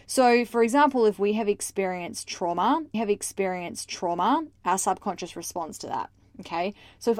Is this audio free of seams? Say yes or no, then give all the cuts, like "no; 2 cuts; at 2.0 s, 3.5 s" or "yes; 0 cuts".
no; 1 cut; at 2.9 s